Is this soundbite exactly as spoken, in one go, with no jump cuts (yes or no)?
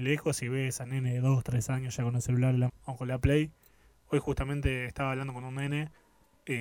no